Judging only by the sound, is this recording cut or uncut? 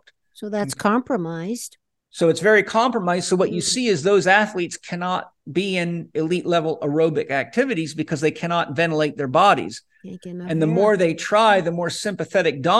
uncut